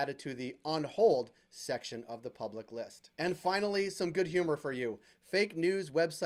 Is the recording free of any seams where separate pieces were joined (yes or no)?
no